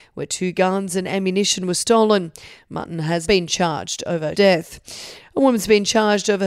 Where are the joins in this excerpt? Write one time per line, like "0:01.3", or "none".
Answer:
0:03.3
0:04.3